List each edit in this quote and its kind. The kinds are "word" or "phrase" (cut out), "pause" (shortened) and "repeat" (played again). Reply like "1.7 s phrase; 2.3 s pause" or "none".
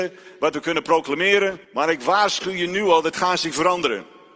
1.6 s pause; 3.1 s word